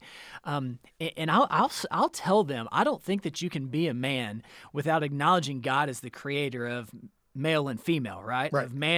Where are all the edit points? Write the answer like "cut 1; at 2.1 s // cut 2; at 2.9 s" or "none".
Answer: none